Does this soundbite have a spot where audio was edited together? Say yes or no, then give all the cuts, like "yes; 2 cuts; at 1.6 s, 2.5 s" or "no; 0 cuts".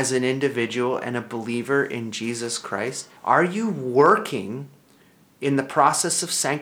yes; 1 cut; at 3.2 s